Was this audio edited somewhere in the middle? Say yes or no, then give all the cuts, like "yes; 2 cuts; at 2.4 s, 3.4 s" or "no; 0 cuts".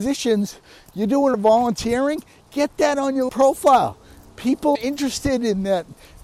yes; 3 cuts; at 1.3 s, 3.3 s, 4.8 s